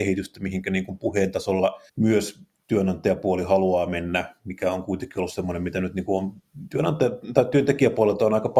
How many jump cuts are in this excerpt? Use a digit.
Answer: 1